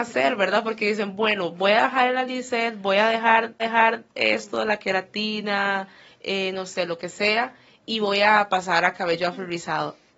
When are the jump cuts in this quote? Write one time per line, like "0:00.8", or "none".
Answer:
0:03.6

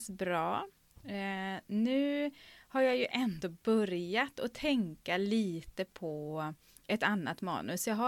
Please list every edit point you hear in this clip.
none

